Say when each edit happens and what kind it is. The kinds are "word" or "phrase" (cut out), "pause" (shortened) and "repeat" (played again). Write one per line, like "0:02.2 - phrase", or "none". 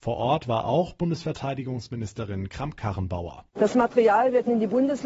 0:03.5 - pause